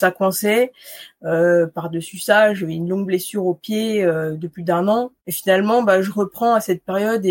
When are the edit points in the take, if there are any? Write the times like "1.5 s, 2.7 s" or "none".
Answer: 5.2 s